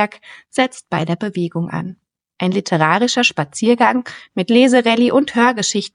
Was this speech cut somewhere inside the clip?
no; 0 cuts

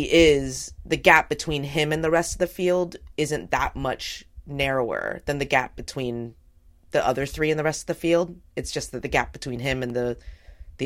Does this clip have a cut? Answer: no; 0 cuts

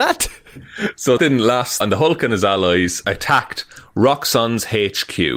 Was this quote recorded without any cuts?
no; 3 cuts; at 1.2 s, 1.8 s, 3.0 s

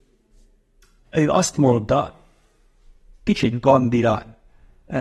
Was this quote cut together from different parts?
no; 0 cuts

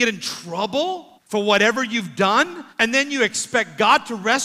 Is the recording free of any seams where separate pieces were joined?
no; 2 cuts; at 1.2 s, 2.7 s

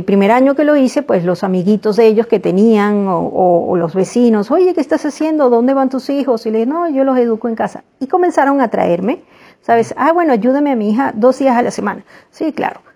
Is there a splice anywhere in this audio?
no; 0 cuts

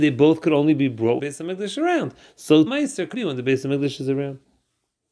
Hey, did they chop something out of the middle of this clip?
yes; 3 cuts; at 1.2 s, 2.7 s, 3.1 s

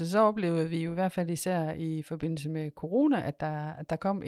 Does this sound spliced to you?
no; 0 cuts

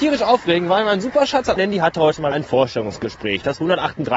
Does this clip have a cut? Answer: yes; 2 cuts; at 1.6 s, 2.3 s

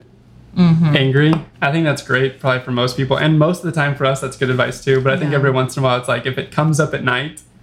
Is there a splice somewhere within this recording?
yes; 1 cut; at 1.5 s

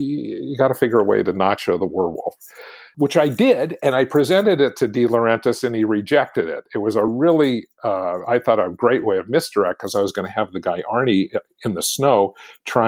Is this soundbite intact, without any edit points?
yes; 0 cuts

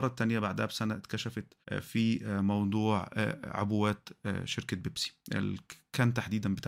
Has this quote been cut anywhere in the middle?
yes; 1 cut; at 1.6 s

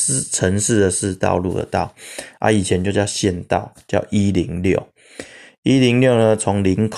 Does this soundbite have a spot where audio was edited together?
no; 0 cuts

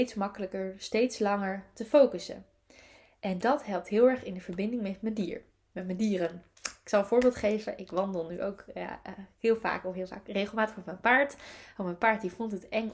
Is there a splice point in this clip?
no; 0 cuts

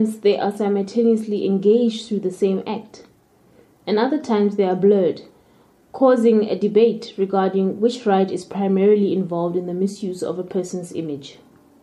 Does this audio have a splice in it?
no; 0 cuts

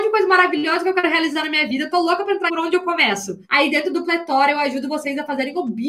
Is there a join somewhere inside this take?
yes; 2 cuts; at 2.5 s, 3.4 s

